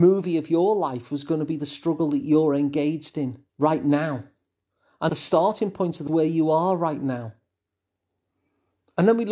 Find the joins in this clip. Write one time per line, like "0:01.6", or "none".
0:03.5
0:05.1
0:06.1